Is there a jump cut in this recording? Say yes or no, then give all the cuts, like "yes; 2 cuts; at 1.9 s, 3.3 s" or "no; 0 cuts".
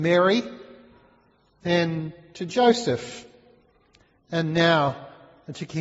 no; 0 cuts